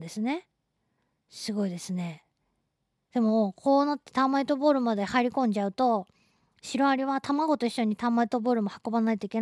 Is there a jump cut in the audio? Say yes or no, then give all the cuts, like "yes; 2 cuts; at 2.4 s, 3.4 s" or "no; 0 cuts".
no; 0 cuts